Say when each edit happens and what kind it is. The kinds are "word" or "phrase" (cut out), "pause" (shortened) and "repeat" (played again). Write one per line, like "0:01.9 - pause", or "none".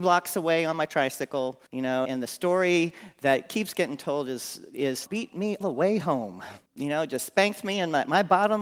0:01.7 - pause
0:02.0 - word
0:05.1 - phrase
0:05.6 - word
0:06.7 - pause